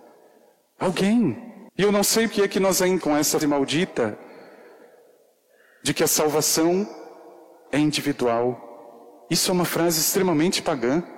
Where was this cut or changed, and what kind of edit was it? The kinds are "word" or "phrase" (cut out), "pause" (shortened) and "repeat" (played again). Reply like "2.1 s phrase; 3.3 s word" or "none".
1.7 s pause; 2.3 s word; 3.0 s word; 3.4 s word